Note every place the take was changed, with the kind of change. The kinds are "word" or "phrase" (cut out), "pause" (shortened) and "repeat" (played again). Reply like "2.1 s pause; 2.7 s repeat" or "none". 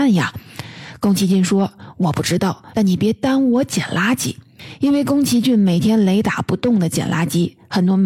2.7 s phrase